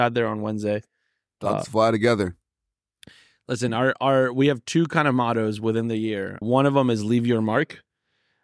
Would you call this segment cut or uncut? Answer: cut